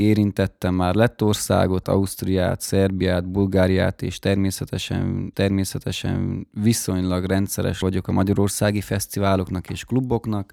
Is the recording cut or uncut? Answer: cut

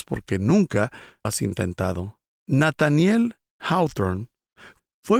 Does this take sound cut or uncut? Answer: cut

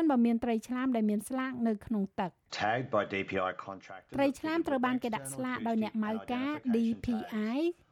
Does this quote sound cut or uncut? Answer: cut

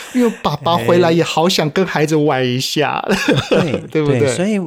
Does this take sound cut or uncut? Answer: uncut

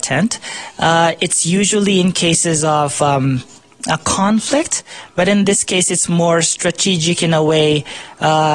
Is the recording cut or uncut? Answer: uncut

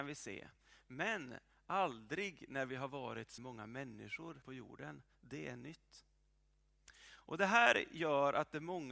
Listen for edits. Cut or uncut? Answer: cut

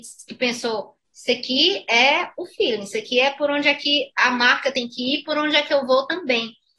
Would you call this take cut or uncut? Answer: uncut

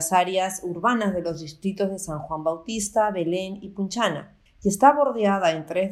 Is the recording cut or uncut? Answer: cut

